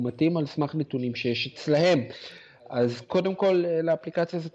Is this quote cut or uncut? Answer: uncut